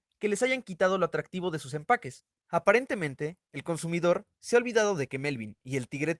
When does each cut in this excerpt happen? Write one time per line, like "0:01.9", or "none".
0:02.3